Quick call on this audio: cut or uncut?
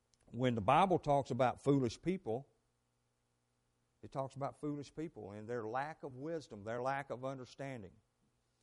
uncut